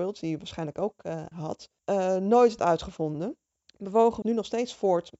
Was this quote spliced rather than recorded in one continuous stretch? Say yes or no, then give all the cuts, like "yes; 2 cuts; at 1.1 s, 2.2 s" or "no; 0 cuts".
yes; 5 cuts; at 1.3 s, 1.8 s, 2.6 s, 3.5 s, 4.2 s